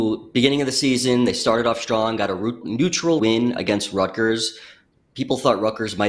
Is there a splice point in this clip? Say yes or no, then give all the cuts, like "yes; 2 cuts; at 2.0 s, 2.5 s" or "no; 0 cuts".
yes; 2 cuts; at 2.6 s, 3.2 s